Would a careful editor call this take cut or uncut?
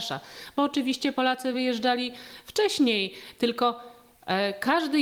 uncut